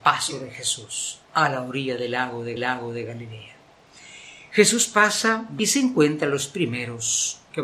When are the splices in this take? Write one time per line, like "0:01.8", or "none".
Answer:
0:01.2
0:02.6
0:05.6